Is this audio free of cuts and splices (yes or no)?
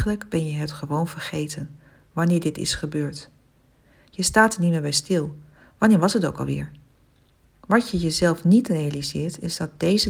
yes